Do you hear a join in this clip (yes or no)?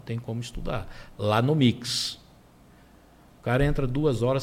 no